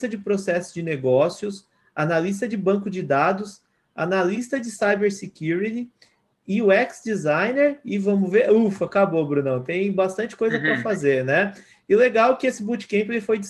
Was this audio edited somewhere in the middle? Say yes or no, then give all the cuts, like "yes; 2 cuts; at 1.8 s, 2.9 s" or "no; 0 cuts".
no; 0 cuts